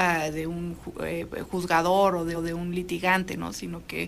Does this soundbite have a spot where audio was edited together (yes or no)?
yes